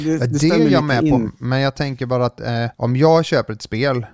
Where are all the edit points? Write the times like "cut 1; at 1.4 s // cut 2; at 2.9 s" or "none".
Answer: cut 1; at 2.7 s